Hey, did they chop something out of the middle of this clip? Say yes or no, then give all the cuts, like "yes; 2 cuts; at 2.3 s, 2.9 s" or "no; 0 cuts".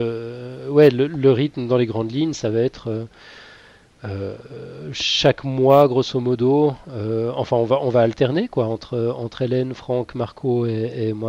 no; 0 cuts